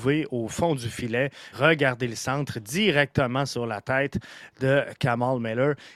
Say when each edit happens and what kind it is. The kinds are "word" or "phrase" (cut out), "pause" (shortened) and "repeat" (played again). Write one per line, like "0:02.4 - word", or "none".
0:01.5 - word